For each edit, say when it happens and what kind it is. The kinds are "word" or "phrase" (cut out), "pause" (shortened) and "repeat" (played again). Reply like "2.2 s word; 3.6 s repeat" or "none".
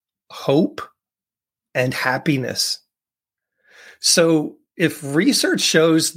none